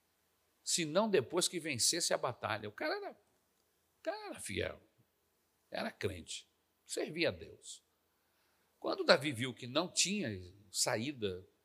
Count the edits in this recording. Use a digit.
0